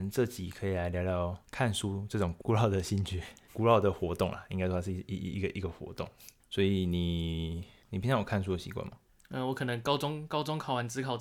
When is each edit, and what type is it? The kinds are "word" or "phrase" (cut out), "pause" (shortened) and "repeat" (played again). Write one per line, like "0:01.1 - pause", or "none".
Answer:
none